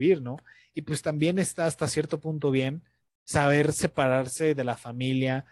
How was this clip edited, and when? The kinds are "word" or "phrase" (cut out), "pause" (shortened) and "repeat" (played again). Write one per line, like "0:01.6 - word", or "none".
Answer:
0:03.0 - pause

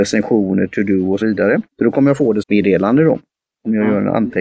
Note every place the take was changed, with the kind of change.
0:01.2 - word
0:01.7 - pause
0:02.4 - phrase

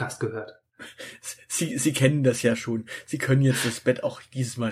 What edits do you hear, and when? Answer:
none

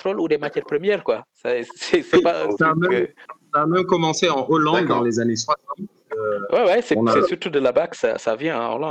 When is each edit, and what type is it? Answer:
none

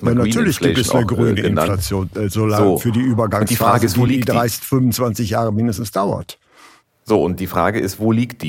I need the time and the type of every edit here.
none

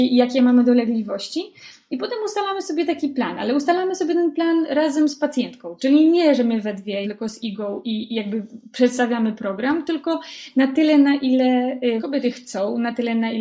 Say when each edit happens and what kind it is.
0:07.0 - word
0:12.0 - word

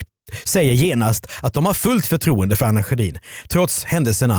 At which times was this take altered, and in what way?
none

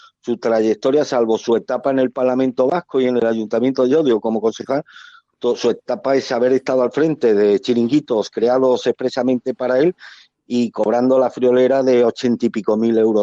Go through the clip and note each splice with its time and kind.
none

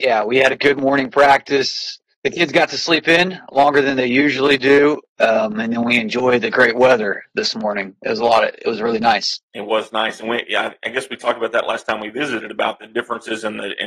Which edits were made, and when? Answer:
0:02.1 - pause
0:09.4 - pause

